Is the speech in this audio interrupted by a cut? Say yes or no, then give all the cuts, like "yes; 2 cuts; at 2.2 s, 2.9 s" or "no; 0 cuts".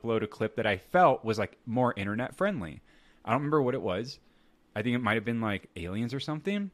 no; 0 cuts